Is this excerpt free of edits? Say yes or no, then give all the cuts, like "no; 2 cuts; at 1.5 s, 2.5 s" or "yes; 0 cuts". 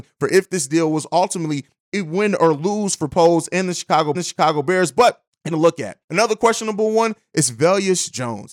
no; 3 cuts; at 4.1 s, 5.5 s, 6.0 s